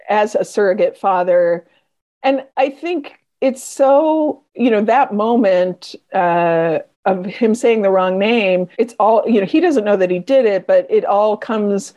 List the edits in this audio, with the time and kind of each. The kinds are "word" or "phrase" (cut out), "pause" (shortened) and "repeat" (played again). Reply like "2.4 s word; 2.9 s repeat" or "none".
2.5 s pause; 4.5 s pause; 6.9 s pause; 8.7 s pause